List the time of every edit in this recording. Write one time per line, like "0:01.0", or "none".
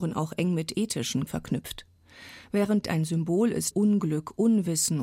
0:01.3
0:02.8
0:03.7